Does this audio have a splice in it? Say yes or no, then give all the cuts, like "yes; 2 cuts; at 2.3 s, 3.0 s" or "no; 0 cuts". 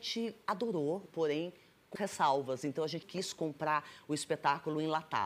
yes; 3 cuts; at 1.1 s, 2.0 s, 3.0 s